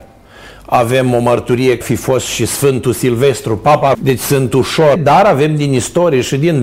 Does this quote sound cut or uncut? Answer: cut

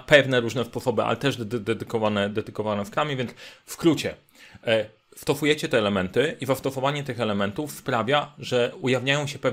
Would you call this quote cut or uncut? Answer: uncut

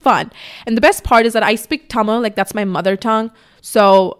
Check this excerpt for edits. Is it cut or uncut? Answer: uncut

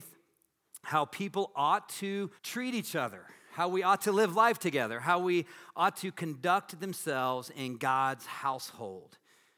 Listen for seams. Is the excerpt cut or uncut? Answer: cut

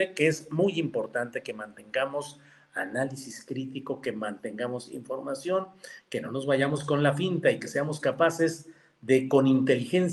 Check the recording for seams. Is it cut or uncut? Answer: uncut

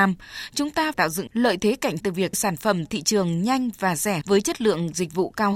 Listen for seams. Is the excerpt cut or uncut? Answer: cut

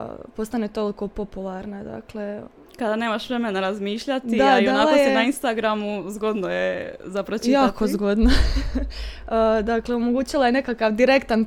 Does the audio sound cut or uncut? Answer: uncut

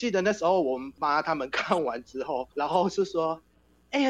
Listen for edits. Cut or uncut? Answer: cut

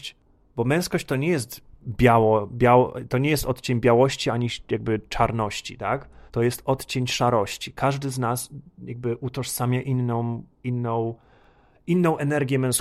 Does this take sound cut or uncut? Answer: cut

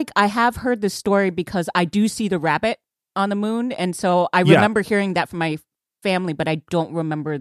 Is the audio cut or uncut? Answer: uncut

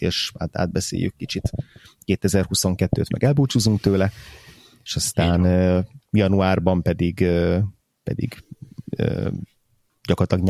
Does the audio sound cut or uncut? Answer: uncut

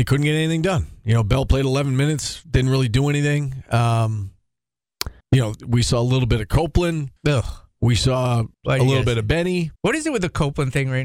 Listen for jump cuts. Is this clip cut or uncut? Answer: cut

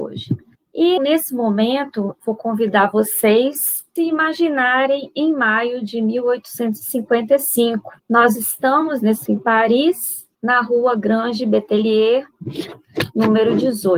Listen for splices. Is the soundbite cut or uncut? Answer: cut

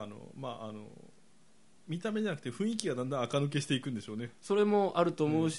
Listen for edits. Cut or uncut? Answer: uncut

